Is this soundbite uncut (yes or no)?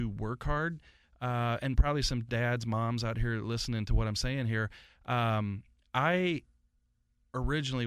yes